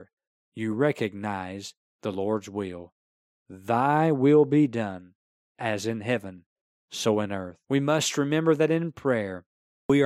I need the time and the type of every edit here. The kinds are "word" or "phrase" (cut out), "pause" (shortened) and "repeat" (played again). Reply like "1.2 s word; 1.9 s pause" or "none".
7.6 s pause